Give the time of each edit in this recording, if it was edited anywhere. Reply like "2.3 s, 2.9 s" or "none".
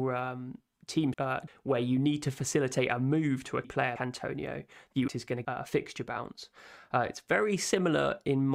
1.1 s, 1.5 s, 3.6 s, 4.0 s, 5.1 s, 5.4 s